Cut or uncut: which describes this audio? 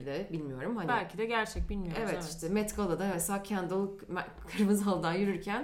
uncut